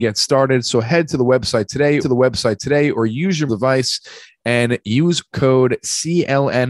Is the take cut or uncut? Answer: cut